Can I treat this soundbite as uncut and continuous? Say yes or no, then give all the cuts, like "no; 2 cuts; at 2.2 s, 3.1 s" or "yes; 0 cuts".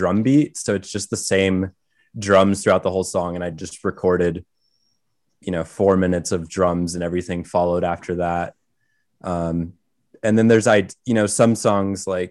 yes; 0 cuts